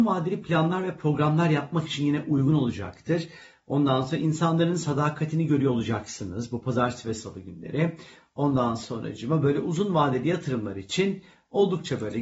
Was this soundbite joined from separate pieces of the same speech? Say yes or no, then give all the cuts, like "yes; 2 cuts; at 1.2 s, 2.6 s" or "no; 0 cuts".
no; 0 cuts